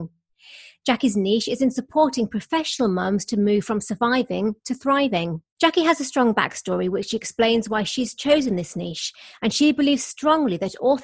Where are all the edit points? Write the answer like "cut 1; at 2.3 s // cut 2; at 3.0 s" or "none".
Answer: cut 1; at 5.5 s